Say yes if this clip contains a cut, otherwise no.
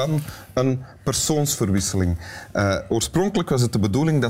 no